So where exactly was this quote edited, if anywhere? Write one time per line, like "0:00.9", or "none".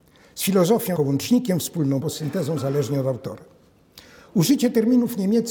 0:01.0
0:02.0